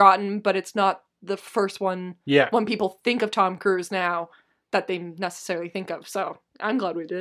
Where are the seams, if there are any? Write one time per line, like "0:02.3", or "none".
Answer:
none